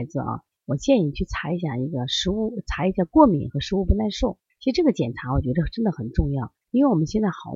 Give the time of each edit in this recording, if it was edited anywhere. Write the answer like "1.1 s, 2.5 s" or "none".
4.5 s, 6.6 s